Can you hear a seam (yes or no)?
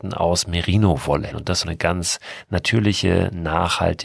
yes